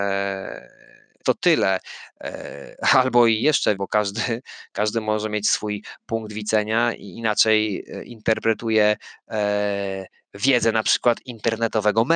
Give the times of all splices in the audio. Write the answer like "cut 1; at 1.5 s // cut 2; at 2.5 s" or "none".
cut 1; at 1.2 s // cut 2; at 3.8 s